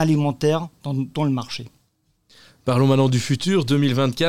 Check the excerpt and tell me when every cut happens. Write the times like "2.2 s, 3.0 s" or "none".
none